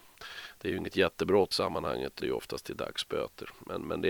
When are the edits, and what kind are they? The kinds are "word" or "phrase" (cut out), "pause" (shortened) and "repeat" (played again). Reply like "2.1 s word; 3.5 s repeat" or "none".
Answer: 1.5 s word; 2.2 s word